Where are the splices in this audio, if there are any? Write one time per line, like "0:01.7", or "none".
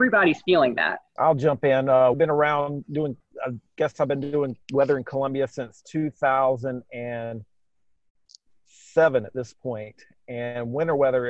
0:02.1
0:04.6